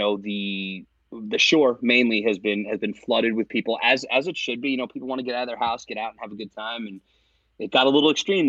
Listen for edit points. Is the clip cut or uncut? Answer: uncut